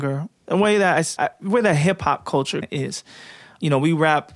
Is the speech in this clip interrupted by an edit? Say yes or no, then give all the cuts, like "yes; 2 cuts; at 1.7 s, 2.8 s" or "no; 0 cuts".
yes; 2 cuts; at 1.2 s, 2.6 s